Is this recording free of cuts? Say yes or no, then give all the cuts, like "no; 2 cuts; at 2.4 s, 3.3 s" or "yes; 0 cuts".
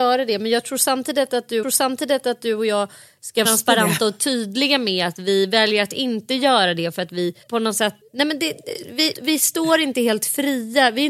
no; 5 cuts; at 1.6 s, 3.4 s, 7.4 s, 8.0 s, 9.1 s